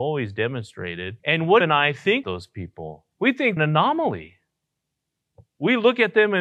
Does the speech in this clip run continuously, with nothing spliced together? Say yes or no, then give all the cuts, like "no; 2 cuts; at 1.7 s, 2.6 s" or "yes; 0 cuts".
no; 5 cuts; at 1.2 s, 1.6 s, 2.2 s, 3.1 s, 3.6 s